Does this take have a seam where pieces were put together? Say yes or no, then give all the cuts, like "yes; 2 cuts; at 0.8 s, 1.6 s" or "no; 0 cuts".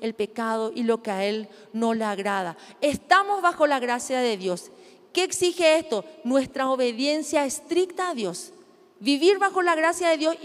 no; 0 cuts